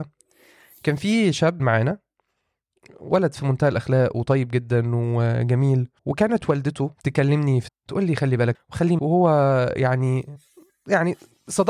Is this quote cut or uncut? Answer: cut